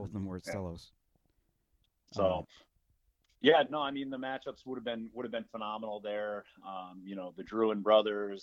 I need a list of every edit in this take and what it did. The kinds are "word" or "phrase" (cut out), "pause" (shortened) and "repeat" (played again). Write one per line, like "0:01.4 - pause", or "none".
none